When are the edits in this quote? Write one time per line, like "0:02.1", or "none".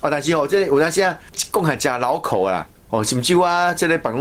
none